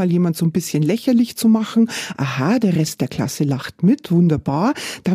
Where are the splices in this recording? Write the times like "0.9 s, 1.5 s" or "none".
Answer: none